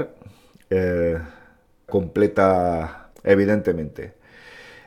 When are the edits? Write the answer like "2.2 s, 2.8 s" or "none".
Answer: 1.9 s, 3.1 s